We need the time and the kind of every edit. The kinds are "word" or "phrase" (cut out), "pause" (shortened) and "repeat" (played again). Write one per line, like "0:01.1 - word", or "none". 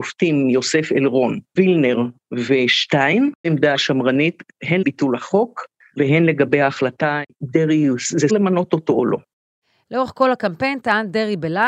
0:01.6 - word
0:03.4 - word
0:03.7 - word
0:04.8 - word
0:07.3 - word
0:08.3 - word